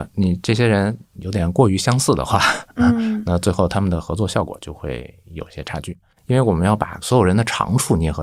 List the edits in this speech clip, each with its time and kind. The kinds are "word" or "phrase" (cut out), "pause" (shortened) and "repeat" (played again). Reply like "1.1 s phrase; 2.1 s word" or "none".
6.1 s pause